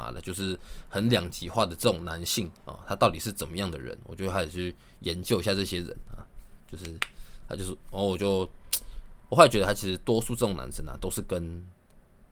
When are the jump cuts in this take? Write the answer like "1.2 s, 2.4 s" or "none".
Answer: 2.6 s

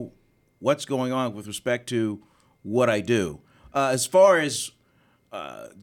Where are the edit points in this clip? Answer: none

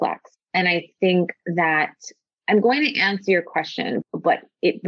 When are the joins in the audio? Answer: none

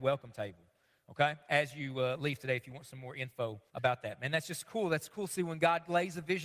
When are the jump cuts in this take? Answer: 3.7 s

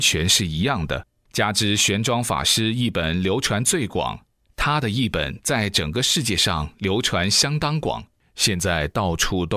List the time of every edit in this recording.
none

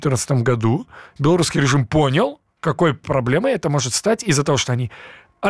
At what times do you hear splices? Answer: 3.0 s

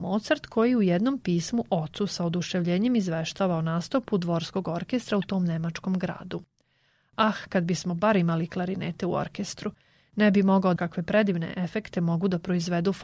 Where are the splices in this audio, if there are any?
10.8 s

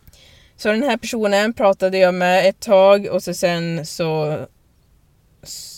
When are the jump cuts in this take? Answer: none

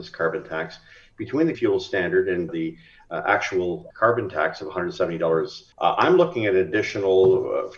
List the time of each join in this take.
1.5 s, 2.5 s, 3.9 s, 5.7 s

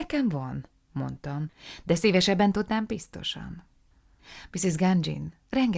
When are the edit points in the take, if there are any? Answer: none

